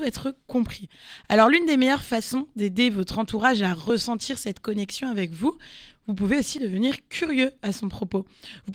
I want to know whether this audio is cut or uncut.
uncut